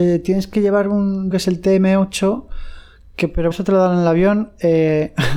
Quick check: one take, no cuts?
no; 2 cuts; at 1.3 s, 3.5 s

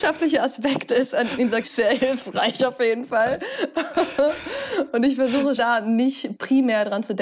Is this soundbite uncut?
no; 2 cuts; at 1.6 s, 5.6 s

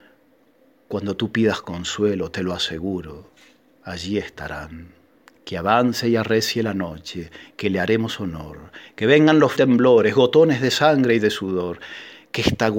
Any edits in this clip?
yes; 2 cuts; at 5.1 s, 9.6 s

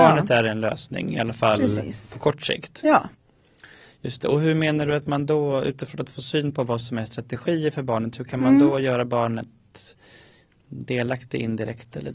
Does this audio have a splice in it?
no; 0 cuts

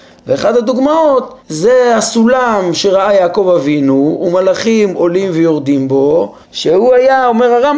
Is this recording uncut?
no; 2 cuts; at 1.4 s, 6.4 s

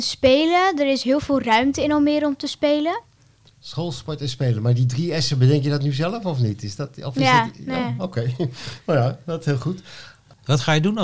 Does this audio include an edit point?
no; 0 cuts

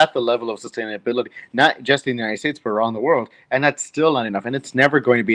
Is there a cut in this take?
no; 0 cuts

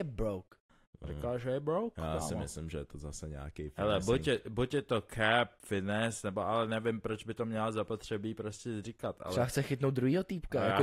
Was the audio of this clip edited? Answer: no; 0 cuts

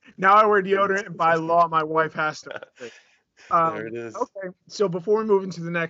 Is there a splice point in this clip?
yes; 1 cut; at 2.4 s

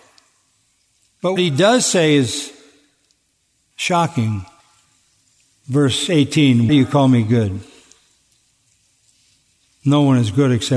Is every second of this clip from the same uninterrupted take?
no; 2 cuts; at 1.4 s, 6.7 s

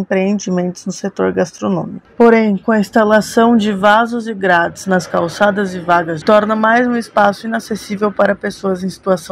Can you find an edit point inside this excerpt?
yes; 2 cuts; at 2.1 s, 6.2 s

